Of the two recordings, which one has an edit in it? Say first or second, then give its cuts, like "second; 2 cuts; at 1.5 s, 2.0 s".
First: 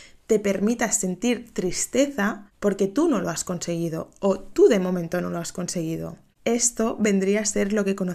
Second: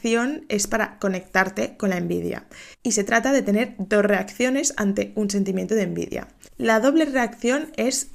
second; 1 cut; at 2.7 s